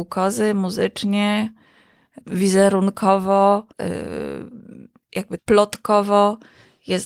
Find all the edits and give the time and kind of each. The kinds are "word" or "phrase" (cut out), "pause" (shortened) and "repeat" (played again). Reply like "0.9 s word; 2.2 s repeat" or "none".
2.2 s word; 3.7 s pause; 5.4 s word